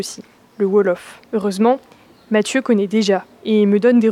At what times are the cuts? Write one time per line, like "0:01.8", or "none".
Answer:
0:01.3